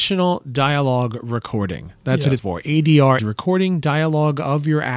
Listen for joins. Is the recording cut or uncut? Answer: cut